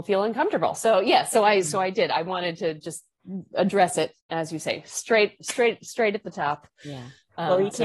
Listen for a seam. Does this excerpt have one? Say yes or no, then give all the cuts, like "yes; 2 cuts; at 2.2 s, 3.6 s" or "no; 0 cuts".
yes; 1 cut; at 4.2 s